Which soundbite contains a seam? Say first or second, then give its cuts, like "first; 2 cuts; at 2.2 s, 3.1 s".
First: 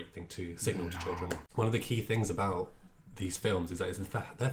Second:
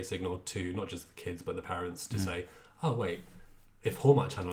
first; 1 cut; at 1.5 s